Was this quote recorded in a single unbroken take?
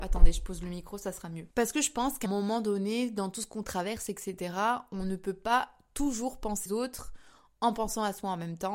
no; 3 cuts; at 1.5 s, 2.3 s, 6.7 s

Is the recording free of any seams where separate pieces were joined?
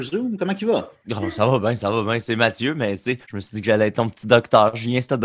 no; 2 cuts; at 1.0 s, 3.2 s

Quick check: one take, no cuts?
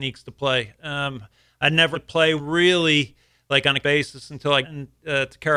no; 4 cuts; at 1.9 s, 2.4 s, 3.8 s, 4.6 s

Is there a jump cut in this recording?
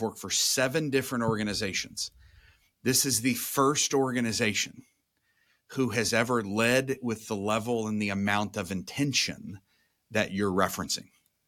no; 0 cuts

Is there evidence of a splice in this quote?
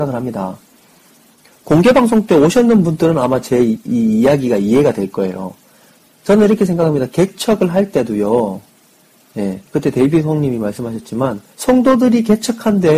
yes; 3 cuts; at 6.0 s, 9.7 s, 11.5 s

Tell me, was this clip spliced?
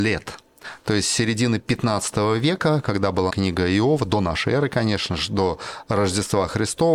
yes; 1 cut; at 3.3 s

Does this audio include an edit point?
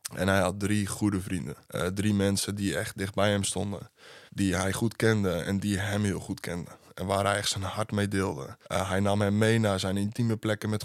yes; 3 cuts; at 1.6 s, 4.3 s, 8.6 s

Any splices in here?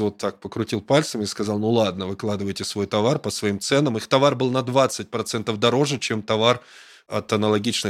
no; 0 cuts

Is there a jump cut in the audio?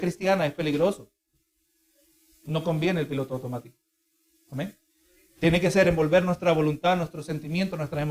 no; 0 cuts

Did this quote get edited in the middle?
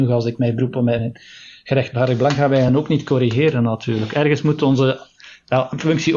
no; 0 cuts

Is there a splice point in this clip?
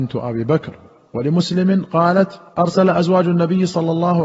yes; 2 cuts; at 1.0 s, 2.5 s

